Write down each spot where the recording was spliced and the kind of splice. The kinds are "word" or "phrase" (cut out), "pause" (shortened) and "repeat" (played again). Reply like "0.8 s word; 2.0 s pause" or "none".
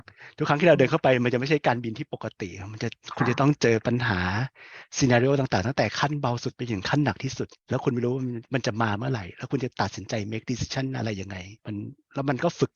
7.6 s pause; 11.6 s pause

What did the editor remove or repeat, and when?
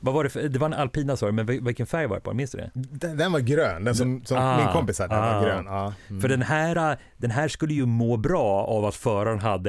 none

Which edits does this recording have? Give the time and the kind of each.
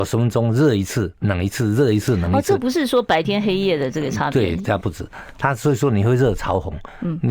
1.2 s word

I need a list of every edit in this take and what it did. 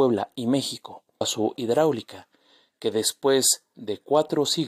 1.2 s word; 1.6 s word

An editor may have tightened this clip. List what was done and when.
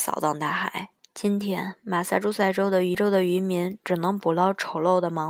1.0 s pause

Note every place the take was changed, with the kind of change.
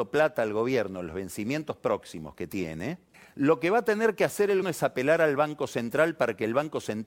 3.1 s pause; 4.6 s word

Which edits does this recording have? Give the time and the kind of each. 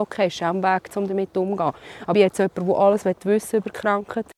2.1 s word

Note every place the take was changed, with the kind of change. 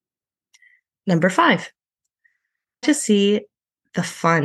2.8 s word

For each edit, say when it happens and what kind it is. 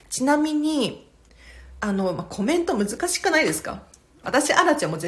none

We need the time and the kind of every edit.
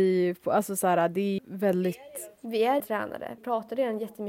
1.4 s word; 2.8 s word; 3.4 s word

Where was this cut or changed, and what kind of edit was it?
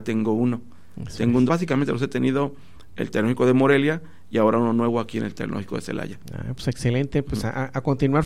1.5 s word; 2.9 s word

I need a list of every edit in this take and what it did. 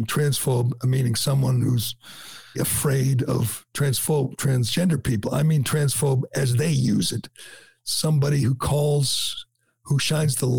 2.5 s word

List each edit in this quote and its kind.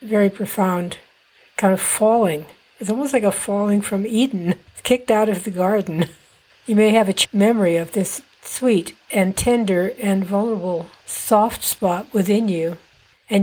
7.2 s word

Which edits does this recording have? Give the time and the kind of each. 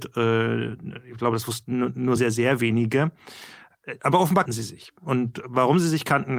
2.2 s word; 4.5 s word

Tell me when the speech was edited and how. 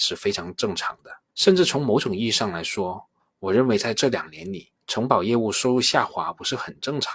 1.3 s pause; 3.2 s pause; 4.8 s pause

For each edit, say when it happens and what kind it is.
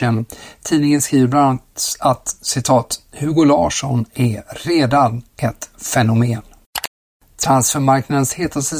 none

